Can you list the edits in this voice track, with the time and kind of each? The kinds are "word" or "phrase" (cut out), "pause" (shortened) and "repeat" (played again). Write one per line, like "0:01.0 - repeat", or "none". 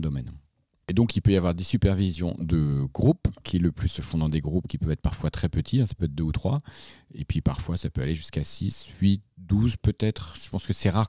0:03.4 - word
0:03.9 - word